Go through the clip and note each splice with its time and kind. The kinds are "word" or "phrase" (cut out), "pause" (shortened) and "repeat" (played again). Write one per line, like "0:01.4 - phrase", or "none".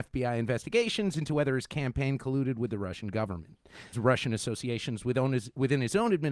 0:03.9 - word

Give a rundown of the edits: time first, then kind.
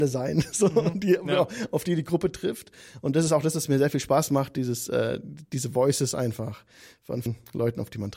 0:07.3 - word

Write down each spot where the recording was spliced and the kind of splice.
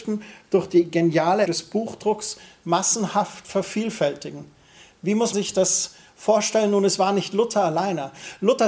0:01.5 - word
0:05.3 - word

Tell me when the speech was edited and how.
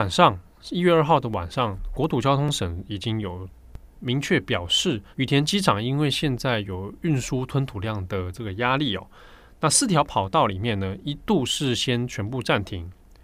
0:05.1 - pause

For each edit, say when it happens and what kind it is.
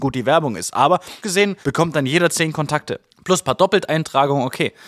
0:01.2 - word
0:01.6 - pause
0:03.1 - pause

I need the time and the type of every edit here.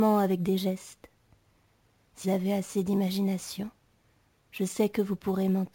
0:02.2 - word

